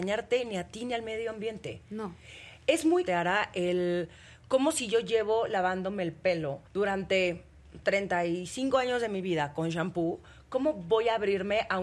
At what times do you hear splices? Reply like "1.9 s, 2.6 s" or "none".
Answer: 3.1 s, 6.7 s